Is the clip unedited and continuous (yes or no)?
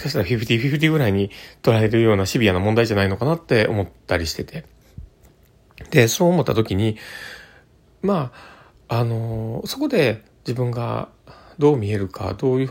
yes